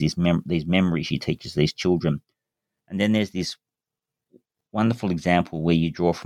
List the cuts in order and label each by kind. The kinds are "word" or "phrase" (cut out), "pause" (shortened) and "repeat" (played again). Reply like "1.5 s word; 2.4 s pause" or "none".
none